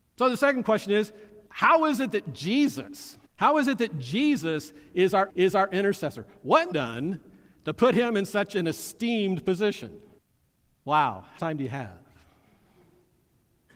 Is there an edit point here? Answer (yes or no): yes